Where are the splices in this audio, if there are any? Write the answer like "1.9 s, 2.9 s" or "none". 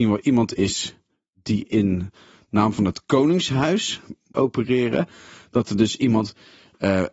4.3 s